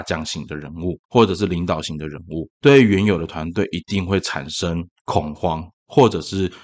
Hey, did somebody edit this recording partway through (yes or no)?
yes